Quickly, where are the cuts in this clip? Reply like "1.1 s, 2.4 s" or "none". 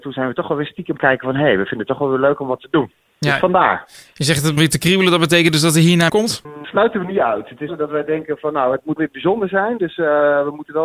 1.0 s, 4.6 s, 6.1 s, 6.6 s, 7.7 s, 9.0 s

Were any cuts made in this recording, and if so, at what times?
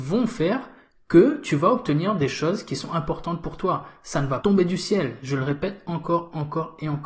4.4 s

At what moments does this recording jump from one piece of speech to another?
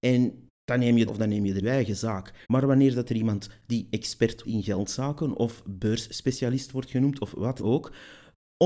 1.1 s, 1.6 s, 2.4 s, 4.4 s, 7.6 s

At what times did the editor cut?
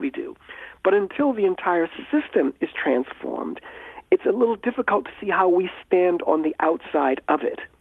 none

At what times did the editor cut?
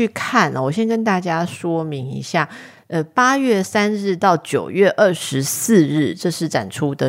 none

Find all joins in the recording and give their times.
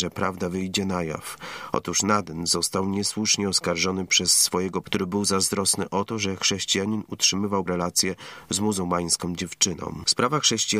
4.8 s, 7.7 s

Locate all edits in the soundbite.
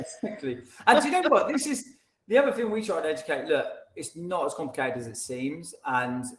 none

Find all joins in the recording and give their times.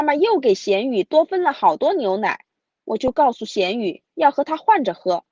none

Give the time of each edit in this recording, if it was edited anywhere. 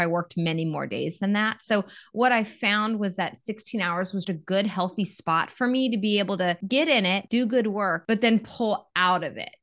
4.2 s

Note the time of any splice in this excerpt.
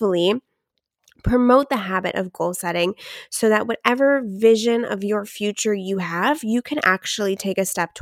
none

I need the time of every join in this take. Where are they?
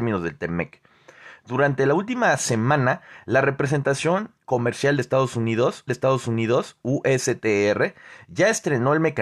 4.4 s, 5.9 s

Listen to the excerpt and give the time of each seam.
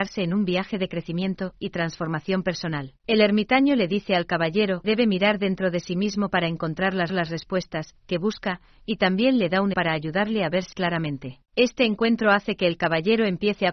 3.0 s, 4.8 s, 7.1 s, 9.7 s, 10.7 s, 11.5 s

